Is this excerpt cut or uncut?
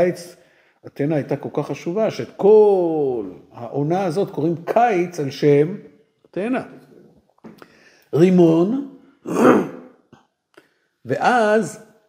uncut